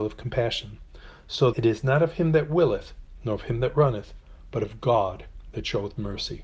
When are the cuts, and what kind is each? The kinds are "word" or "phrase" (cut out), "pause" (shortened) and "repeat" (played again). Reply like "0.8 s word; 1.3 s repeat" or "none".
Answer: 1.5 s word